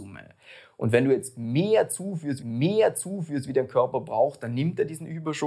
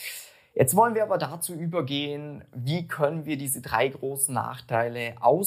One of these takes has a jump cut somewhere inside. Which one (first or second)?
first